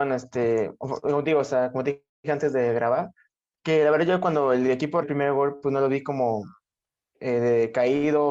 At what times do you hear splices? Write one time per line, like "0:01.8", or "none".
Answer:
0:05.0